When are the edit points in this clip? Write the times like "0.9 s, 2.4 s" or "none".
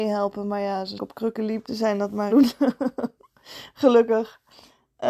1.0 s, 1.7 s, 2.3 s